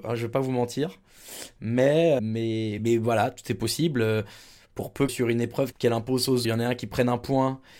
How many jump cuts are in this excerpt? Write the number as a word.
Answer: five